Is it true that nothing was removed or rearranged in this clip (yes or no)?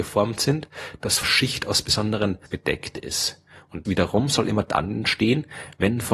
no